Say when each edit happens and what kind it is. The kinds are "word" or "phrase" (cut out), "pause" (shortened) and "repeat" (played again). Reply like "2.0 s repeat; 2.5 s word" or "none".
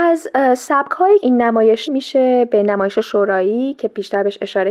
1.2 s word; 1.9 s word